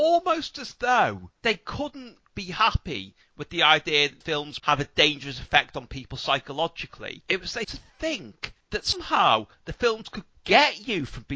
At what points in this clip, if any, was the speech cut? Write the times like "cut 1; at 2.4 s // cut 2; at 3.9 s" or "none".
cut 1; at 2.3 s // cut 2; at 4.2 s // cut 3; at 4.6 s // cut 4; at 7.6 s